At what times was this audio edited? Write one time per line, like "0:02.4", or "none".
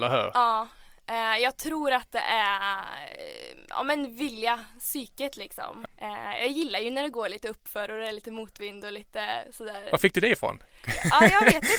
none